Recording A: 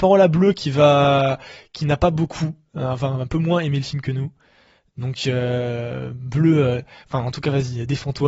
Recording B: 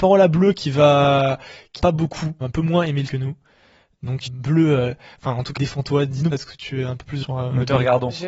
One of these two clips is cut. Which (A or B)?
B